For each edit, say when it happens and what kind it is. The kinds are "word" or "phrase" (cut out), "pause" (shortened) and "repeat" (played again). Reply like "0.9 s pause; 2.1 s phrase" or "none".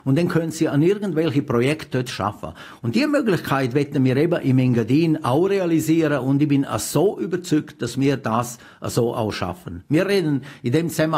none